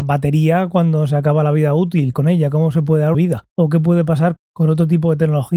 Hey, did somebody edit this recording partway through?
yes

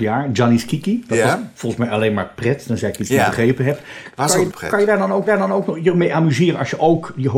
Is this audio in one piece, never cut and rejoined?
no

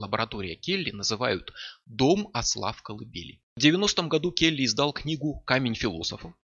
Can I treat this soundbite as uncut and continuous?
no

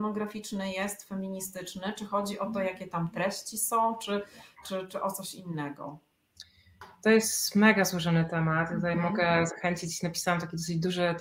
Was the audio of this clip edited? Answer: no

